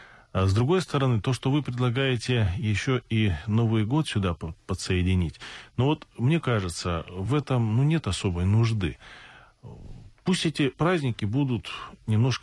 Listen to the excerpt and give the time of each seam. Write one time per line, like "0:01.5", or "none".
none